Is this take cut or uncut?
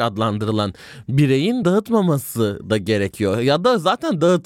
cut